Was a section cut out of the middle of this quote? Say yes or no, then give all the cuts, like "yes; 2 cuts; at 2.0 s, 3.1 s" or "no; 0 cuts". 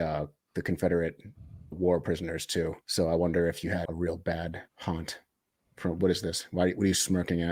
yes; 4 cuts; at 1.7 s, 2.8 s, 3.9 s, 4.7 s